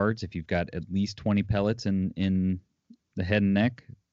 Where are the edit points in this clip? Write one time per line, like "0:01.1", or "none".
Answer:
none